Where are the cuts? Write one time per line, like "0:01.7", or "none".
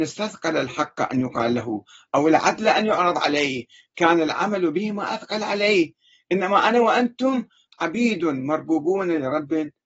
none